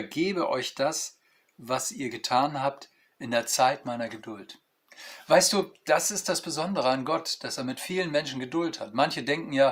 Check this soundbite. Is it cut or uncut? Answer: uncut